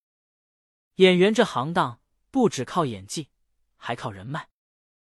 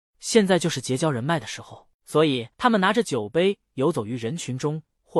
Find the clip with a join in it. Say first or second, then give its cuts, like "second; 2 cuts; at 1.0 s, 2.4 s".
second; 2 cuts; at 1.9 s, 2.5 s